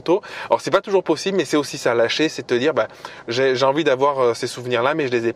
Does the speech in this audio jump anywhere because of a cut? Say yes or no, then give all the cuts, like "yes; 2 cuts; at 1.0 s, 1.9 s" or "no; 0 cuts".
no; 0 cuts